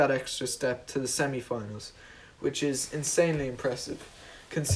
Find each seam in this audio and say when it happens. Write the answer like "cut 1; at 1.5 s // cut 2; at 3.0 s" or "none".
none